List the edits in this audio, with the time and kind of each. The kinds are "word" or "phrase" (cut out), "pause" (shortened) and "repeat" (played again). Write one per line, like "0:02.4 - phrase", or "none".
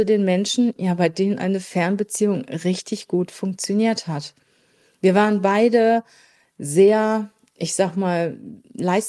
none